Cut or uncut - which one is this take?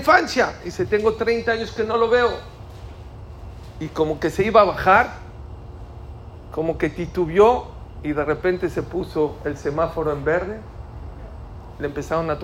uncut